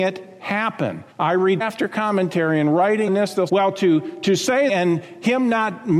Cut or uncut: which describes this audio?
cut